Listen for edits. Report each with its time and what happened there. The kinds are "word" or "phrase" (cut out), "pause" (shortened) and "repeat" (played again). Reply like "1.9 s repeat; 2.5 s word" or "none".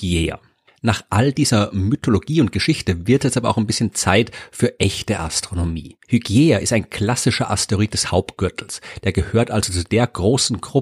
6.0 s pause